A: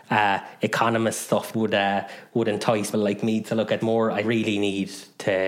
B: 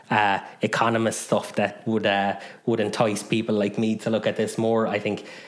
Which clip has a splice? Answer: A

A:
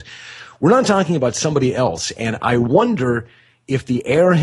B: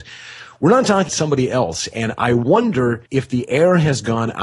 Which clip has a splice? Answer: B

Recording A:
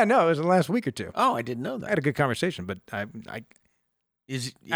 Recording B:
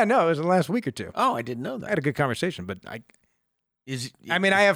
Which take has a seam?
B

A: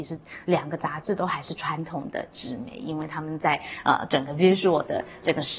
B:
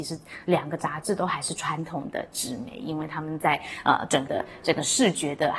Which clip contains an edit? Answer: B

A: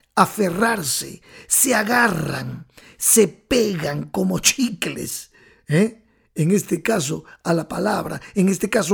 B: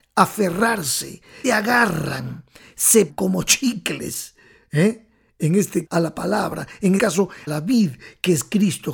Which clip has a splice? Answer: B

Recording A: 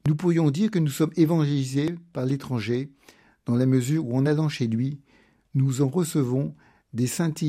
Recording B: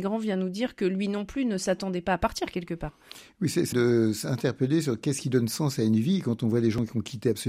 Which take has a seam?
B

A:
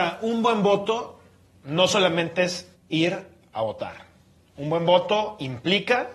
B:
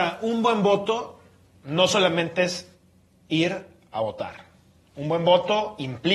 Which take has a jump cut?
A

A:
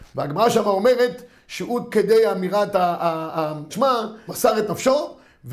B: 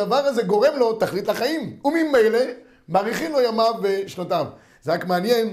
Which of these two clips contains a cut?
A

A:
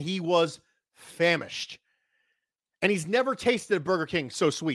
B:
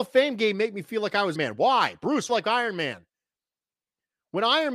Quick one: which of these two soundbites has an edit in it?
B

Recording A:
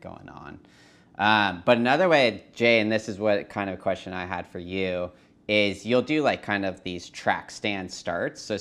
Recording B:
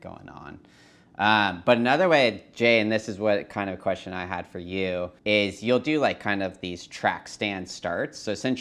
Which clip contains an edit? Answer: B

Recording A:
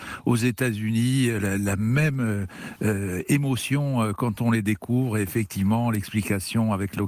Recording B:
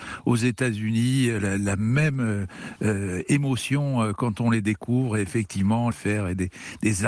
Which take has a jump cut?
B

